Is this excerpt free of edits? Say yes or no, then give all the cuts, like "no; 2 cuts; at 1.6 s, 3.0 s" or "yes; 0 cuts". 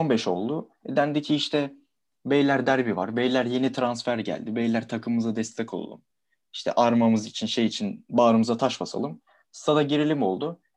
yes; 0 cuts